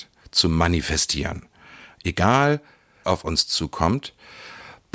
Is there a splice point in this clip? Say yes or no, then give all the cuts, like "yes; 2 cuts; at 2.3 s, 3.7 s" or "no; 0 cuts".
yes; 1 cut; at 3.0 s